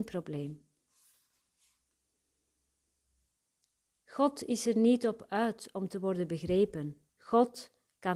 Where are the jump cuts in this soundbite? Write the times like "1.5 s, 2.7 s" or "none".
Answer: 7.1 s